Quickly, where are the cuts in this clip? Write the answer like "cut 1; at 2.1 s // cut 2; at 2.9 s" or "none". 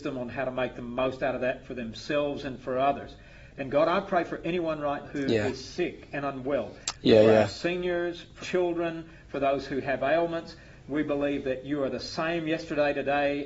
cut 1; at 5.0 s // cut 2; at 8.4 s